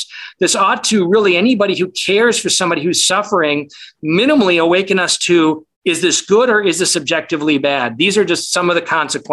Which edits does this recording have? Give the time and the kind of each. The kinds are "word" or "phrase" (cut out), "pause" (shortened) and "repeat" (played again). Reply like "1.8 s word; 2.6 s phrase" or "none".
5.7 s pause

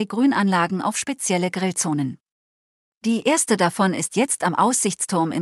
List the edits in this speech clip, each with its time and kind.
none

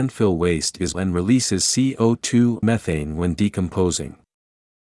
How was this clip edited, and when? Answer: 0.9 s word; 2.6 s word

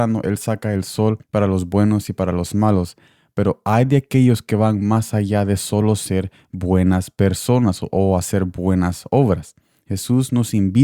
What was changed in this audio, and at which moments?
1.2 s pause

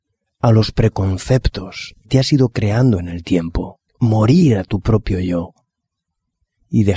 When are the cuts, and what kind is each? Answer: 2.1 s word; 3.9 s pause

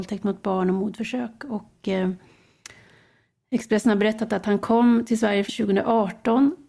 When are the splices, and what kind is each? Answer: 5.5 s word

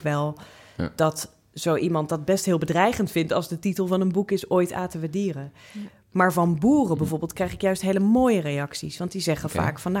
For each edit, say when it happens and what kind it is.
none

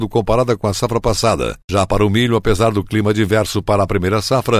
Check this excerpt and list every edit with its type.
none

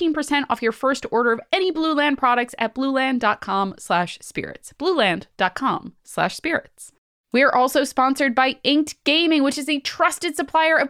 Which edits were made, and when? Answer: none

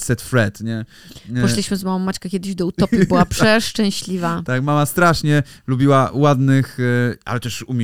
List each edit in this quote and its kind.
none

